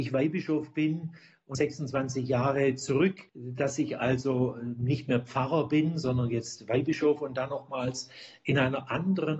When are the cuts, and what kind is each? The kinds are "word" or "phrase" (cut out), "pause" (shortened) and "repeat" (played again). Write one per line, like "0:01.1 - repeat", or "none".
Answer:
0:01.5 - phrase
0:03.3 - pause

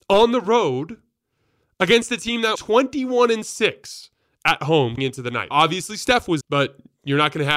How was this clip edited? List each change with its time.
0:02.5 - word
0:05.0 - word
0:05.5 - word
0:06.4 - word

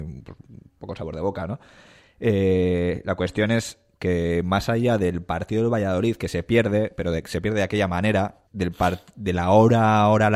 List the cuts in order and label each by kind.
0:08.5 - pause

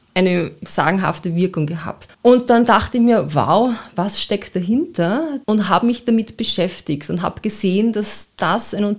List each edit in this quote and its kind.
0:02.1 - pause
0:05.4 - pause

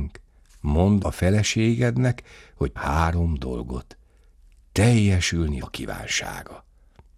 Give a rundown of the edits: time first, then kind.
0:01.0 - word
0:02.8 - word
0:05.6 - word

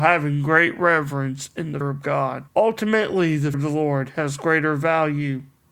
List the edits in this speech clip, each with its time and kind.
0:01.8 - word
0:02.5 - pause
0:03.5 - word

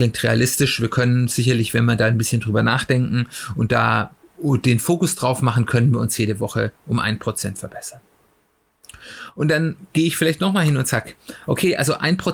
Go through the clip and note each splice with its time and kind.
0:04.2 - pause

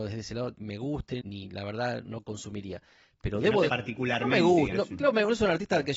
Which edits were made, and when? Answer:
0:01.2 - word
0:02.0 - word
0:03.7 - word
0:04.7 - word

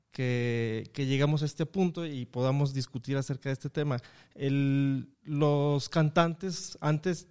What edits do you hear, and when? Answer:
0:05.1 - pause

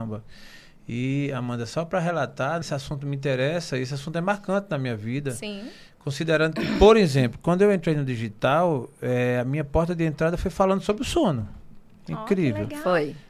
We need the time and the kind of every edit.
0:02.6 - word

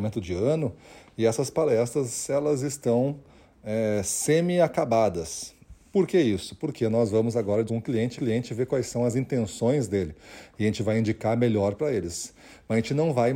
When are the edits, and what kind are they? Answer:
0:07.7 - word
0:08.2 - repeat
0:11.8 - word

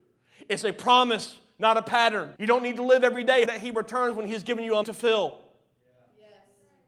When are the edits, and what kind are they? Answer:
0:02.4 - pause
0:03.4 - word
0:04.8 - word

